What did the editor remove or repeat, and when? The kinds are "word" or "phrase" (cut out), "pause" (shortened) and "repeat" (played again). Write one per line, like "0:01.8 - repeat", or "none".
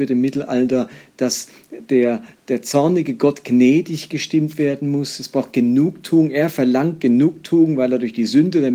none